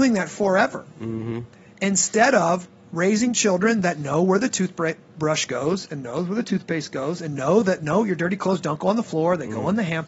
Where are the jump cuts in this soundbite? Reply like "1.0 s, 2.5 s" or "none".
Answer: none